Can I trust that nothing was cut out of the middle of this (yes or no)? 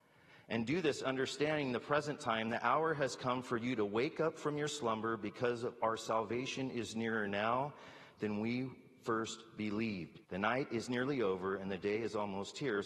no